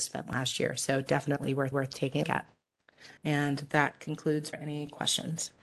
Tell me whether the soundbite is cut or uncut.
cut